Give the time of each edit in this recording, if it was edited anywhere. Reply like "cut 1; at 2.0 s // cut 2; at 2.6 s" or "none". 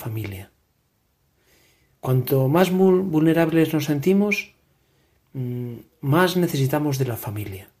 none